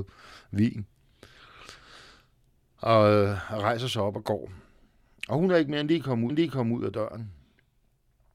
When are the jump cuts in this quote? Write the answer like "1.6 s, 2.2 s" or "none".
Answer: 6.3 s